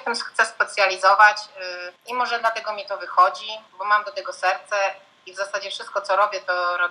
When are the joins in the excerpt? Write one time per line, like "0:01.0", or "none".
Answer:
0:02.0
0:03.7